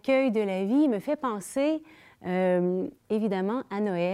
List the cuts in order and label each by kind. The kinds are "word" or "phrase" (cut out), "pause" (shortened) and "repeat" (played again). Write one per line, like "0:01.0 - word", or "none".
0:03.0 - pause